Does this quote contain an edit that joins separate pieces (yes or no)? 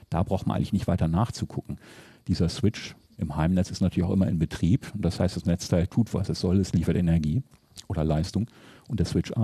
no